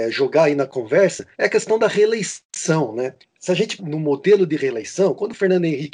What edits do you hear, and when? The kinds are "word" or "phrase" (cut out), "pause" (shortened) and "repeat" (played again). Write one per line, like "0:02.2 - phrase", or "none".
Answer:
0:01.3 - pause
0:03.2 - pause
0:03.8 - word